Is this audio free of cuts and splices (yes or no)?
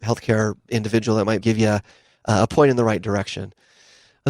no